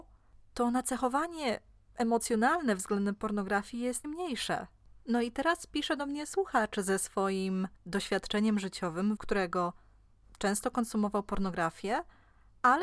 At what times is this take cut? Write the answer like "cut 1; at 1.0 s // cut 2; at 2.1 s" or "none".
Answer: cut 1; at 4.0 s // cut 2; at 7.8 s // cut 3; at 9.2 s